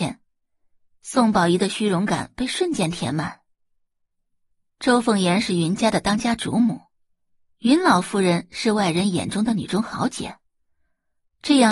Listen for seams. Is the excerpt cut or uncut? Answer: uncut